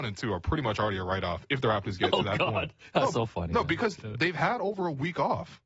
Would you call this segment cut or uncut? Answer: cut